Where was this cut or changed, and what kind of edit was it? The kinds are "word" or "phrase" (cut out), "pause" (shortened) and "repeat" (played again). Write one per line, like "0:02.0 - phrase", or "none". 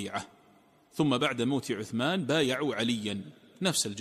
none